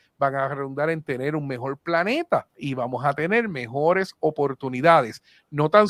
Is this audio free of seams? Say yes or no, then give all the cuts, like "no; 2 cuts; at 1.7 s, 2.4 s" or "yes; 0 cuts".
no; 1 cut; at 2.5 s